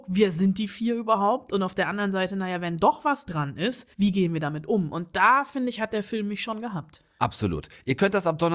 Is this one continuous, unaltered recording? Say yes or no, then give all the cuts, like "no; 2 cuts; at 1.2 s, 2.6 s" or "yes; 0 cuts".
no; 1 cut; at 3.9 s